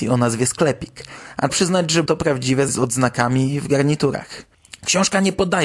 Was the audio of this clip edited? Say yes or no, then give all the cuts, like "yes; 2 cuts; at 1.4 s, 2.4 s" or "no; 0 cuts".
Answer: yes; 3 cuts; at 1.5 s, 2.1 s, 2.7 s